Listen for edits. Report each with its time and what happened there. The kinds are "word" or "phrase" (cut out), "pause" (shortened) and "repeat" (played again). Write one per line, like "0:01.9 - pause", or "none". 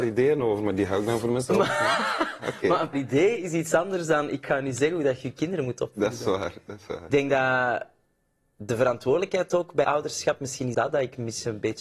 0:02.9 - word
0:07.1 - word
0:09.8 - word
0:10.7 - word